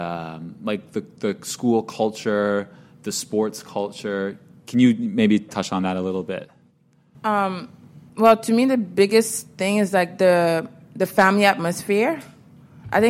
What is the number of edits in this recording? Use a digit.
1